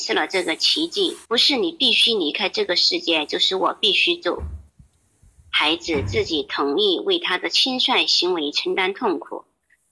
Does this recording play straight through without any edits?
no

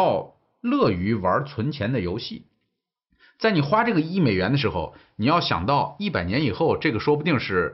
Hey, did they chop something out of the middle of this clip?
no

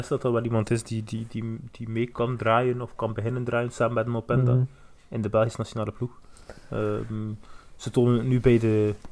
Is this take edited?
no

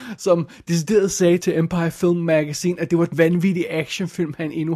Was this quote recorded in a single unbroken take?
no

